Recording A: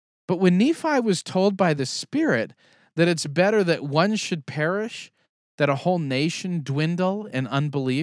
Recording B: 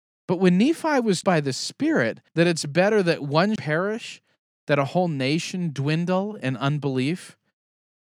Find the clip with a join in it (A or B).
B